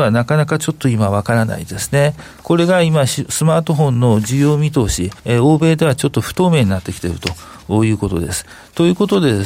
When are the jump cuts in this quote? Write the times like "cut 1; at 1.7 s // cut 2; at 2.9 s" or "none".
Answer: cut 1; at 5.2 s